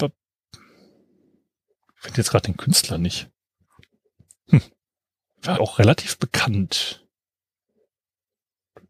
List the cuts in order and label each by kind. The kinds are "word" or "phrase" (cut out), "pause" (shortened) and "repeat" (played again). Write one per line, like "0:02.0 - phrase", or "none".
0:05.6 - word